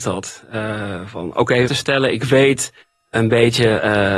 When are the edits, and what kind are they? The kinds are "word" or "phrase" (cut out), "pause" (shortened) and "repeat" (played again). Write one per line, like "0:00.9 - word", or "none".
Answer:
0:01.7 - phrase